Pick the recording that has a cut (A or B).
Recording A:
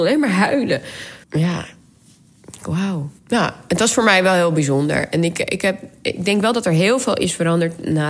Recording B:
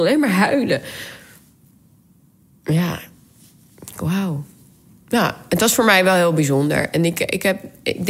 A